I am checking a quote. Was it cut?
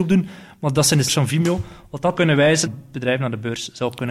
yes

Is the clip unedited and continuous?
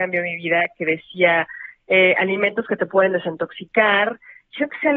yes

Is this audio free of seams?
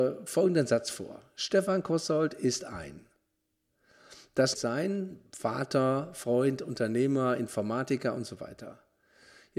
no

